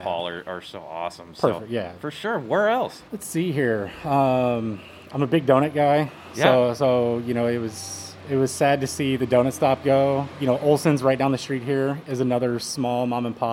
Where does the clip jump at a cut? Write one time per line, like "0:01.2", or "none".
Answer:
0:03.1